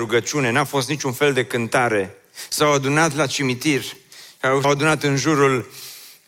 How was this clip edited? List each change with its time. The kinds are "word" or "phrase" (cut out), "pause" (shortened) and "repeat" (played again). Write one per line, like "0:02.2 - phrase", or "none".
0:04.6 - word